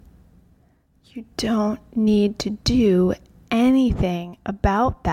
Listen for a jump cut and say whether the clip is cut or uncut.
uncut